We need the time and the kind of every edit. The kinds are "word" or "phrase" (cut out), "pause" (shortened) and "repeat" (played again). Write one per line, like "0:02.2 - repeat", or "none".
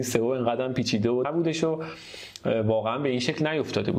0:01.2 - word